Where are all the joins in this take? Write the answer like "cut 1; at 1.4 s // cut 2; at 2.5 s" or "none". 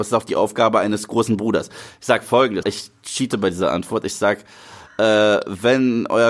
cut 1; at 2.6 s

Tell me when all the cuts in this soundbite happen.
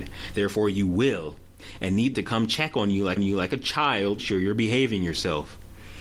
cut 1; at 2.1 s // cut 2; at 3.2 s // cut 3; at 4.2 s

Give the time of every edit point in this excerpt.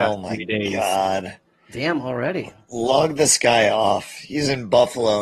none

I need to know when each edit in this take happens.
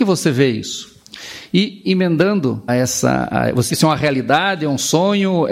cut 1; at 2.7 s // cut 2; at 3.7 s

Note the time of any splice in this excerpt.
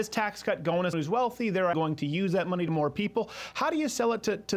cut 1; at 0.9 s // cut 2; at 1.7 s // cut 3; at 2.7 s

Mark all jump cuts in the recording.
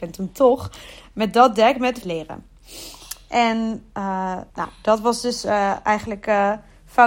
cut 1; at 2.0 s // cut 2; at 4.5 s

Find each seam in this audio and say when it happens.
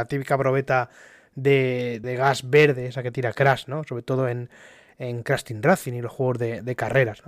cut 1; at 2.0 s

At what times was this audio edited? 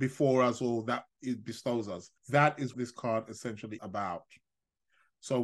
cut 1; at 2.2 s // cut 2; at 2.7 s // cut 3; at 3.8 s

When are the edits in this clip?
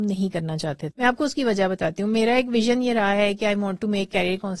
cut 1; at 0.9 s

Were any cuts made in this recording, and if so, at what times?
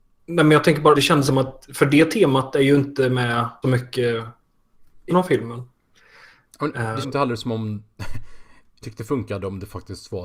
cut 1; at 0.9 s // cut 2; at 1.3 s // cut 3; at 1.7 s // cut 4; at 3.6 s // cut 5; at 5.1 s // cut 6; at 7.0 s // cut 7; at 8.8 s

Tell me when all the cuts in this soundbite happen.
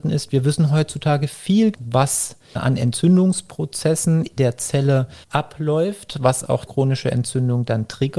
cut 1; at 1.7 s // cut 2; at 2.6 s // cut 3; at 4.4 s // cut 4; at 5.2 s // cut 5; at 6.7 s

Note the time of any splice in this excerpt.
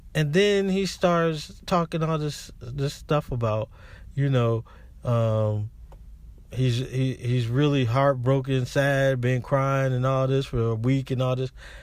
none

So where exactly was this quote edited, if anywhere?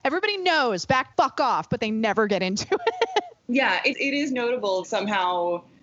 cut 1; at 1.1 s // cut 2; at 3.4 s // cut 3; at 3.9 s // cut 4; at 4.8 s

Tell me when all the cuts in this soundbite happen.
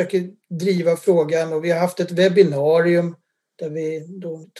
none

